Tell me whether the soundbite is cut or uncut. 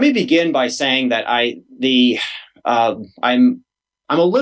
uncut